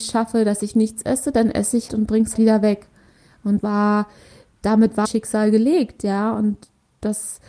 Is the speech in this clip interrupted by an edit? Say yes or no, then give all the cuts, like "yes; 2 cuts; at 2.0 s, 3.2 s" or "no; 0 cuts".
yes; 4 cuts; at 1.9 s, 2.3 s, 3.6 s, 5.0 s